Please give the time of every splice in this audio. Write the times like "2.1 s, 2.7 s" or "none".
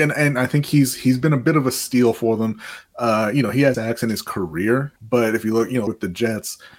3.7 s, 5.0 s, 5.9 s